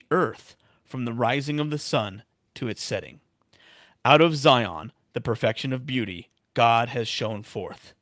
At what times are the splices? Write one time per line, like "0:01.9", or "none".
none